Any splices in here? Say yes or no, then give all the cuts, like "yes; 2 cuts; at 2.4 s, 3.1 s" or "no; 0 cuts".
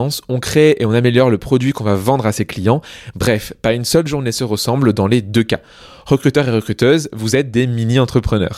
no; 0 cuts